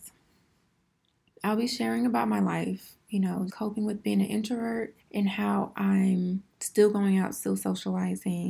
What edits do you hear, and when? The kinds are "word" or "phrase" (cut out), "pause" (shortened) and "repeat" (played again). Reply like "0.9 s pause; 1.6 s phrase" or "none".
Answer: 3.5 s word; 5.0 s pause; 6.5 s pause